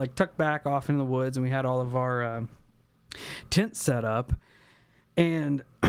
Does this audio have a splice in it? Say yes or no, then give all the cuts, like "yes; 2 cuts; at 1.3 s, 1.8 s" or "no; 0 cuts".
no; 0 cuts